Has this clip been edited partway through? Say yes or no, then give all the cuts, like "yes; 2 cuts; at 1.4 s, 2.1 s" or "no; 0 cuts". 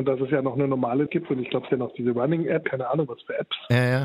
yes; 3 cuts; at 1.1 s, 1.7 s, 2.6 s